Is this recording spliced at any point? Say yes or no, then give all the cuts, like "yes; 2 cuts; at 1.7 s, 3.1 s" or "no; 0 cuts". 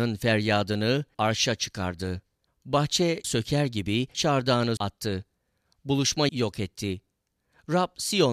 yes; 5 cuts; at 1.1 s, 3.2 s, 4.1 s, 4.8 s, 6.3 s